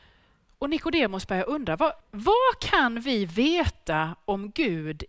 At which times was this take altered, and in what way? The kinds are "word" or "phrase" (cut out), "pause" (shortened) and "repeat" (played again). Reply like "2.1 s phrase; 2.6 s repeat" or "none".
2.0 s pause